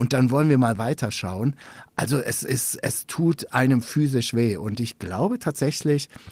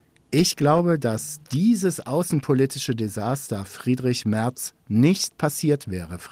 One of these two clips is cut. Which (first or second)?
second